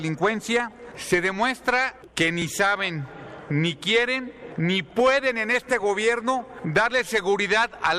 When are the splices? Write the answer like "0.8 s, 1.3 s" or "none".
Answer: none